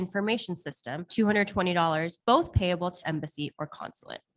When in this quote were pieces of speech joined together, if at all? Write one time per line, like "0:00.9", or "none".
0:01.1
0:03.0